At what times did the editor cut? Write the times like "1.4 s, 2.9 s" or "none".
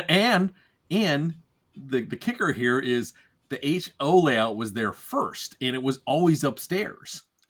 none